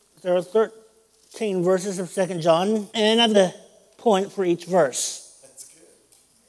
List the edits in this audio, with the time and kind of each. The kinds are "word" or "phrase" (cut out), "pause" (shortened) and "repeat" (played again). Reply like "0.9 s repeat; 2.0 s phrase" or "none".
2.9 s pause; 3.3 s word